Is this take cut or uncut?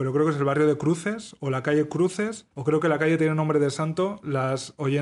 cut